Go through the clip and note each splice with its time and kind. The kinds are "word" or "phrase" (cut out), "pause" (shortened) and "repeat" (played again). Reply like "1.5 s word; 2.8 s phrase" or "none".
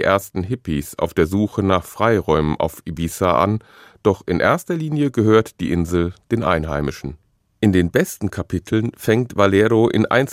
none